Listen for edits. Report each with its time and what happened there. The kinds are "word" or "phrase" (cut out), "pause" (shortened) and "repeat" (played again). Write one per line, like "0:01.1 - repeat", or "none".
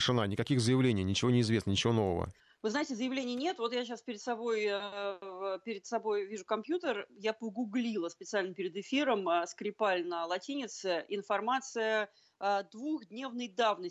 0:02.4 - pause